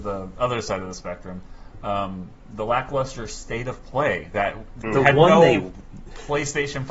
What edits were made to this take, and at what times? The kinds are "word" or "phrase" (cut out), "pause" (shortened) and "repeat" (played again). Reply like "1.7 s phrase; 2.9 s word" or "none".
4.8 s word

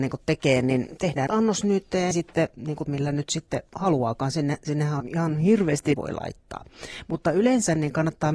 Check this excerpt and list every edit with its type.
1.3 s word; 2.1 s phrase; 2.9 s word; 5.0 s word; 5.9 s phrase

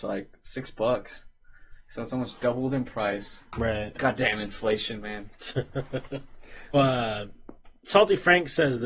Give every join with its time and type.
6.7 s word

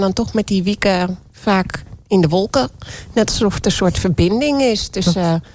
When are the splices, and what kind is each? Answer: none

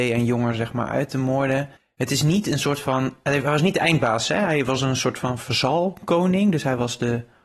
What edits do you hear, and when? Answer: 1.8 s pause

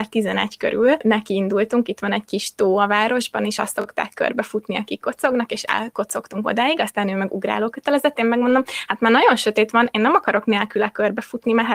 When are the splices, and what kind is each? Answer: none

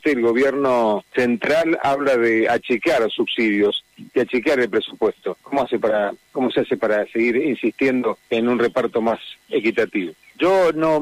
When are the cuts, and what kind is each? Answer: 1.1 s pause; 5.4 s pause; 8.2 s pause

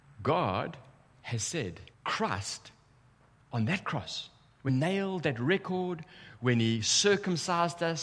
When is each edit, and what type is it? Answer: 1.9 s pause; 4.7 s word

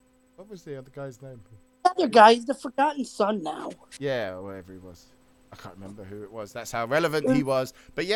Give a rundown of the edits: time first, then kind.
none

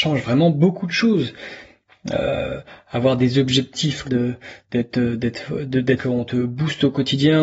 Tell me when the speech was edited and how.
4.0 s word; 6.0 s phrase

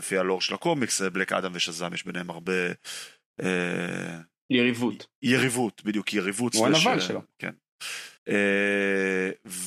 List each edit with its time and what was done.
8.2 s pause

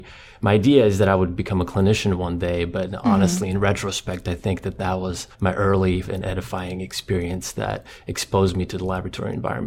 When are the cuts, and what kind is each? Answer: 5.3 s pause; 6.0 s word

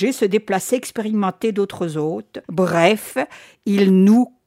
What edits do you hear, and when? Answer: 2.4 s pause

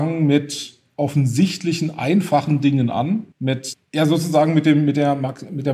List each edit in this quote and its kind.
3.3 s pause

